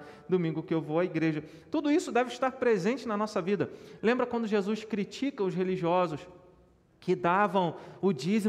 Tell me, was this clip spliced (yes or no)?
no